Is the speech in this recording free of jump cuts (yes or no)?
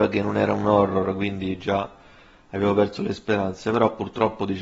yes